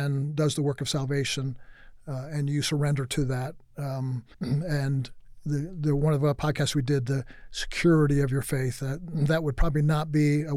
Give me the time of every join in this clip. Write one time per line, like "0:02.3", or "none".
0:04.3